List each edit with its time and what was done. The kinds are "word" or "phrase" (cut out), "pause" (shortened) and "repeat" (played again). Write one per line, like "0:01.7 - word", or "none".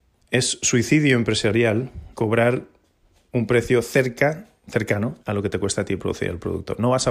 0:02.1 - pause
0:05.2 - pause